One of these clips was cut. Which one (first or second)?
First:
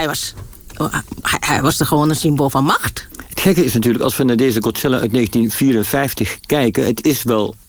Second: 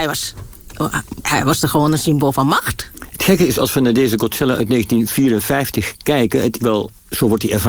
second